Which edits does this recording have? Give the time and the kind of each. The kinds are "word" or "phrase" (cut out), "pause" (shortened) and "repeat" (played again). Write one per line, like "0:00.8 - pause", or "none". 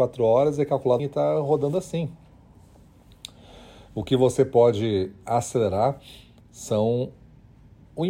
0:01.0 - word